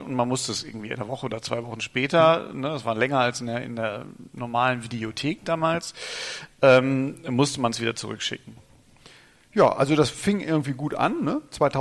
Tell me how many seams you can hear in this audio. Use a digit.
0